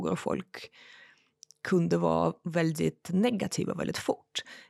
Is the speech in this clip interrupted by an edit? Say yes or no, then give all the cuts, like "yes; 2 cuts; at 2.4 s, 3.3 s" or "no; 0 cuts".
no; 0 cuts